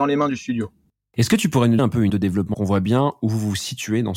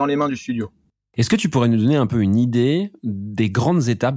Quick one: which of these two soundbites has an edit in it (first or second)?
first